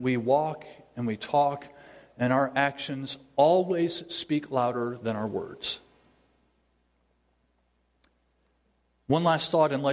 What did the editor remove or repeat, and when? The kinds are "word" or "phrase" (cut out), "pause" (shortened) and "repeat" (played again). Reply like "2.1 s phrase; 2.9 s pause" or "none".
none